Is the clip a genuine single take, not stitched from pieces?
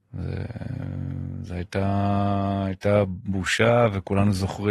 yes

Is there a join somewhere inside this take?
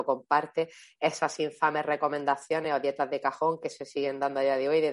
no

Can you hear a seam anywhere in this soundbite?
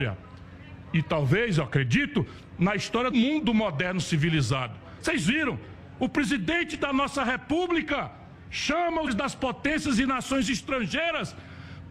yes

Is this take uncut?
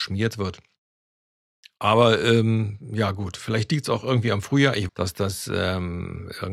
no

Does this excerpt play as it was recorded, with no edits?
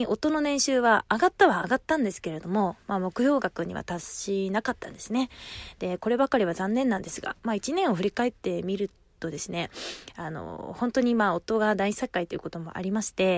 yes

